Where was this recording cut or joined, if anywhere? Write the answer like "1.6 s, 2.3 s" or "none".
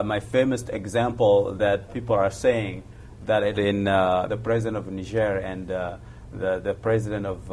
1.9 s, 3.6 s, 4.3 s